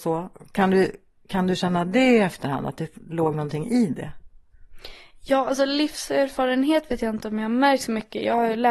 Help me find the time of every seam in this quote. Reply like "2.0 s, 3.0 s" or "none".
none